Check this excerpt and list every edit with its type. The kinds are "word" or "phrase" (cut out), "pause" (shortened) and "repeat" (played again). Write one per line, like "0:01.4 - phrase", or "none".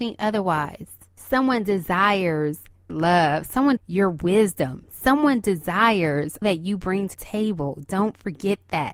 0:02.9 - word
0:03.8 - word
0:06.4 - word
0:07.1 - word